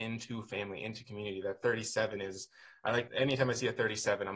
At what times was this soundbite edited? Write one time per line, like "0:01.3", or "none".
0:03.1

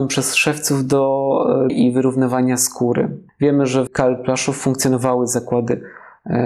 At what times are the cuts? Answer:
0:01.7
0:03.9

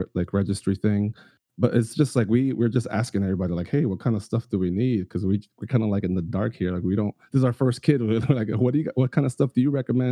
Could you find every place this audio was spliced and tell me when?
none

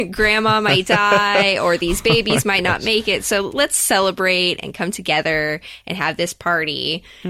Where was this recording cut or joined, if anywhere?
0:03.5

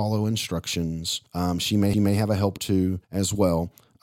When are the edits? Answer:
0:01.3
0:01.9
0:02.6
0:03.0

